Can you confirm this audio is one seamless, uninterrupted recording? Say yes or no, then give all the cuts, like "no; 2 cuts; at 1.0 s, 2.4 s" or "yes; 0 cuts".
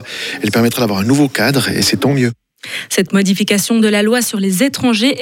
yes; 0 cuts